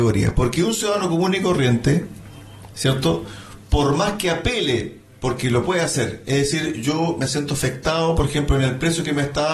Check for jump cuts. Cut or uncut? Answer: uncut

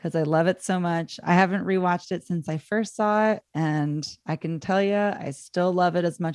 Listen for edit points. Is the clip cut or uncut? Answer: cut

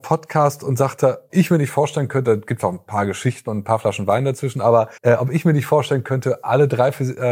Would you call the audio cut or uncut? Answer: cut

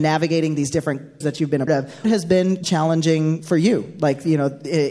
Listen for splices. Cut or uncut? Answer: cut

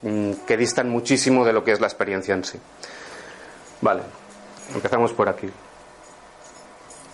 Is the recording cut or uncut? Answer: uncut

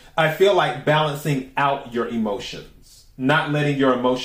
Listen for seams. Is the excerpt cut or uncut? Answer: uncut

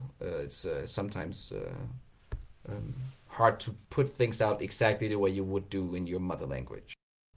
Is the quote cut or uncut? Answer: cut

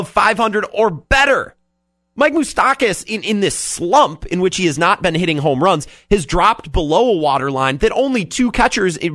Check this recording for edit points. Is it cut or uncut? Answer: uncut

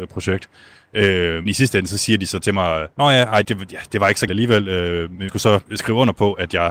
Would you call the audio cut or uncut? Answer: cut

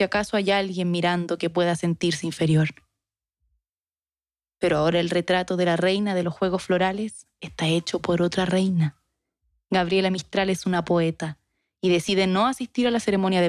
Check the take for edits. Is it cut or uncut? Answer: uncut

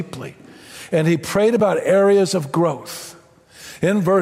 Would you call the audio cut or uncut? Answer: uncut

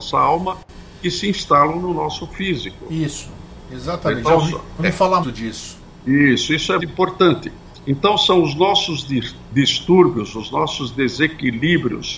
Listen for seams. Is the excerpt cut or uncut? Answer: cut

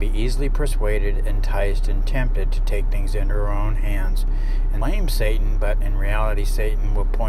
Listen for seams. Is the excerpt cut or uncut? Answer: cut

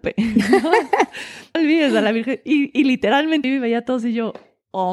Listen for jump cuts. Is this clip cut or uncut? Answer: cut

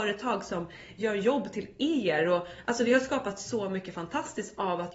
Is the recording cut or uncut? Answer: uncut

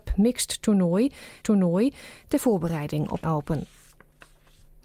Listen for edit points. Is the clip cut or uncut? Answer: cut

